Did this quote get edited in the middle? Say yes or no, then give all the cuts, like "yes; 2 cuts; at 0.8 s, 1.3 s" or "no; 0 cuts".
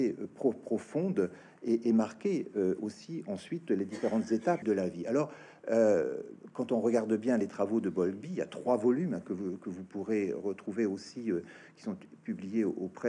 yes; 1 cut; at 4.6 s